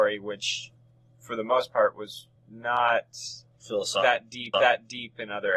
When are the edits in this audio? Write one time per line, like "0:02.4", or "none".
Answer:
0:02.4
0:04.5